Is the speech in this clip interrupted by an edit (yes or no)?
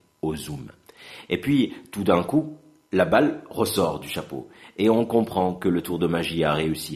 no